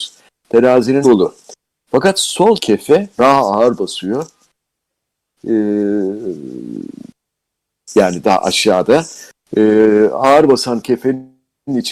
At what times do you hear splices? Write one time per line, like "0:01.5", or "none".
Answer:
0:01.0
0:02.6
0:03.1